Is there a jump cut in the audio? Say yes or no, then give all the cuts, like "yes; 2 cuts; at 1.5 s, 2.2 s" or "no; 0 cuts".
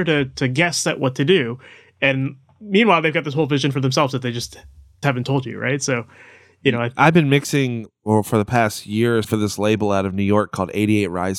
yes; 3 cuts; at 5.0 s, 7.9 s, 9.2 s